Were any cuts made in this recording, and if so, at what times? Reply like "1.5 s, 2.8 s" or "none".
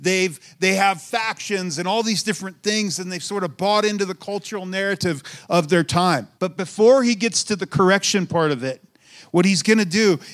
6.4 s